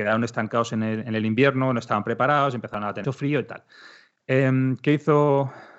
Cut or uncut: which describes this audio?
cut